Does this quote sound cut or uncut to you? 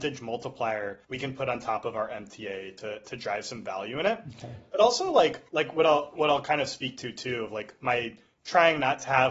cut